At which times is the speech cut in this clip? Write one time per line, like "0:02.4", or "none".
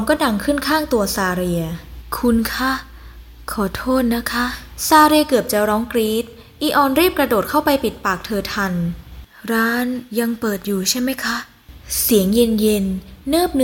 0:10.1